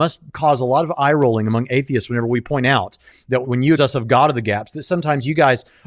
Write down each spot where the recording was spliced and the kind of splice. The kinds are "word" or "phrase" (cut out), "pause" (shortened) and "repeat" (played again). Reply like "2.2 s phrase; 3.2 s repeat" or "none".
3.4 s word; 3.8 s word